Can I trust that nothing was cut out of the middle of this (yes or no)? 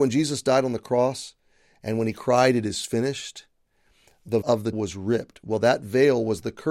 no